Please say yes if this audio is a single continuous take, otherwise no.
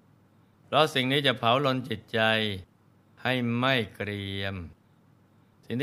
yes